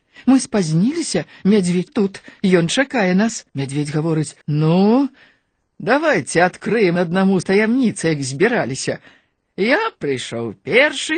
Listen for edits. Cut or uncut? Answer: cut